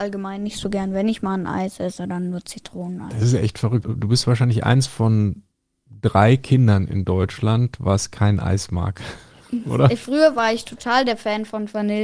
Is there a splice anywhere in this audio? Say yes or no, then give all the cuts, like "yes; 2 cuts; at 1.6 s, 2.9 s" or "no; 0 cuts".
no; 0 cuts